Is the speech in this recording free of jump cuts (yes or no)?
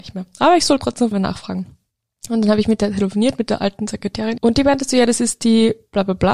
no